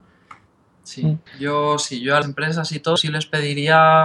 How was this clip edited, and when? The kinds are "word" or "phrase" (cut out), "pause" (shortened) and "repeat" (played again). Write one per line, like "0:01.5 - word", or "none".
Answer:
0:01.3 - pause
0:02.2 - word
0:03.0 - word